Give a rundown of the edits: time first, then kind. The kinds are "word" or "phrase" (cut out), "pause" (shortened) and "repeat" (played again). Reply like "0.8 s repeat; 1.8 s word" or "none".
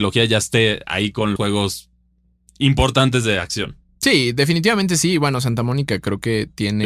1.4 s word